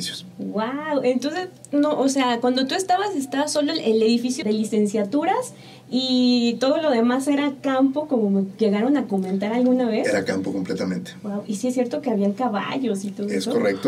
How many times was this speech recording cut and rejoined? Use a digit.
1